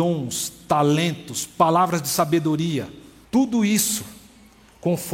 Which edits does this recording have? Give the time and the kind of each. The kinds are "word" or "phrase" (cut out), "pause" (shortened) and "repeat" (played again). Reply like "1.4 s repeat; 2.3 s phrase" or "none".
3.2 s pause